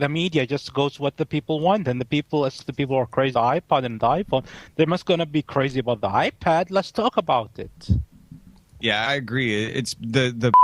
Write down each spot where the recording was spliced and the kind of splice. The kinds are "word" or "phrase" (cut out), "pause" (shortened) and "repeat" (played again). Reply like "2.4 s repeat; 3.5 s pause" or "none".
2.6 s word; 3.3 s word; 9.1 s word